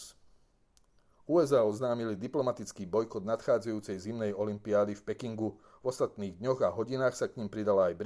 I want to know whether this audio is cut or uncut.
uncut